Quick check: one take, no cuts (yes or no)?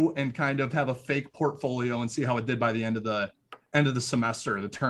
yes